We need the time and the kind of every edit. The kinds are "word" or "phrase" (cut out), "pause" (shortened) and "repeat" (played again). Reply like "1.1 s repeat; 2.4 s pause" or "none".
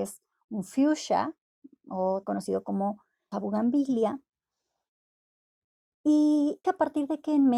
2.2 s word; 3.3 s word; 6.6 s word